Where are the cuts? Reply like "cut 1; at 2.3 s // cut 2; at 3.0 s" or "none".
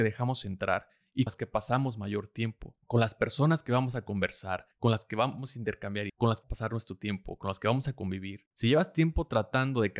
cut 1; at 1.3 s // cut 2; at 4.7 s // cut 3; at 6.1 s // cut 4; at 6.4 s